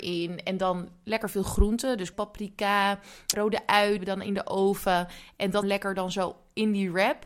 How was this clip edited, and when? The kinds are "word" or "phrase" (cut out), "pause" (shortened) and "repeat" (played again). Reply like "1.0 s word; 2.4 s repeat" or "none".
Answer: 2.1 s word; 3.3 s word; 4.0 s word; 5.6 s word